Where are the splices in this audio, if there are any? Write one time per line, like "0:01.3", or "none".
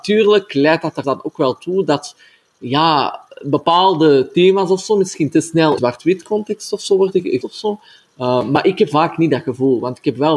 0:01.0
0:05.8
0:07.4
0:08.9